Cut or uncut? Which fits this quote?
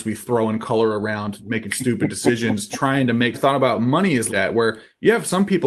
cut